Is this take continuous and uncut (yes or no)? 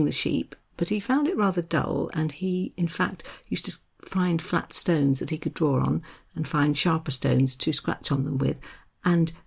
yes